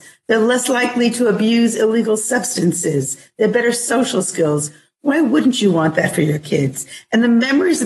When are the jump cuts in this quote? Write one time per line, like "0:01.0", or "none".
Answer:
none